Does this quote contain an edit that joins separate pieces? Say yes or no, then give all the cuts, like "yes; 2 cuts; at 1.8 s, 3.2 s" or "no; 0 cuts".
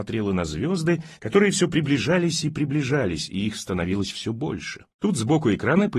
yes; 2 cuts; at 1.1 s, 4.9 s